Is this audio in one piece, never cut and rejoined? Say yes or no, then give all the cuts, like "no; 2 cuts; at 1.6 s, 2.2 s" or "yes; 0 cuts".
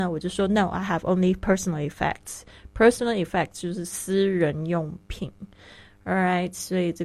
yes; 0 cuts